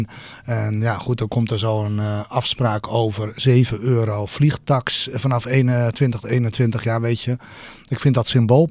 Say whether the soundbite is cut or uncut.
uncut